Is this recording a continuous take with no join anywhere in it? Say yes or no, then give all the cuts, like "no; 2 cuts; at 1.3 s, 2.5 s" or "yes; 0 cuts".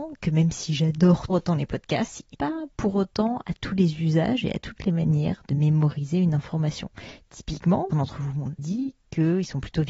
no; 4 cuts; at 1.3 s, 2.3 s, 7.9 s, 8.6 s